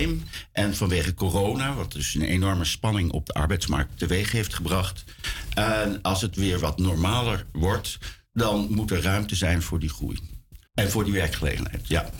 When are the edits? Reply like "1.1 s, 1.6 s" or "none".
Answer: 10.7 s